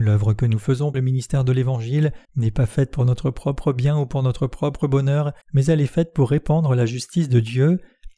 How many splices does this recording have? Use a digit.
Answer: 3